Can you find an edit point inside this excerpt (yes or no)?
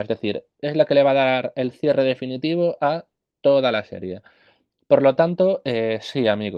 no